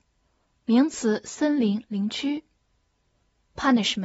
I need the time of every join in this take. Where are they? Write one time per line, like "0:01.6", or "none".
none